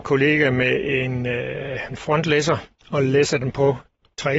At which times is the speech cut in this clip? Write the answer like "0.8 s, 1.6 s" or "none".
1.9 s